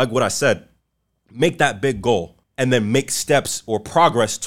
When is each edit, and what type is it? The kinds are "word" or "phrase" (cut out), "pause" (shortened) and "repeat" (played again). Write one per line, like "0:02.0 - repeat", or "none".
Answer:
0:02.4 - pause